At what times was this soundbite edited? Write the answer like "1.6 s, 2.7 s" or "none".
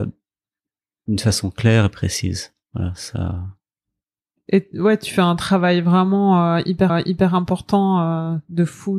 2.6 s, 6.9 s